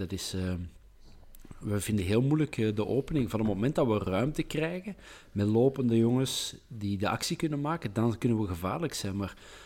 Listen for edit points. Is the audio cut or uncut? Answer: uncut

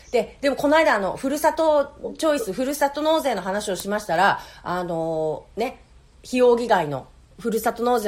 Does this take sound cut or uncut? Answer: uncut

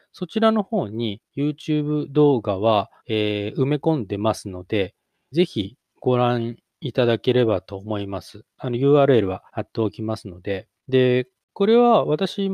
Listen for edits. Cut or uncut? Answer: cut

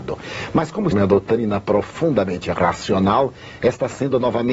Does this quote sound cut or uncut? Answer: cut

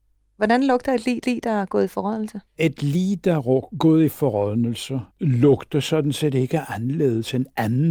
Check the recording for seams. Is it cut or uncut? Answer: cut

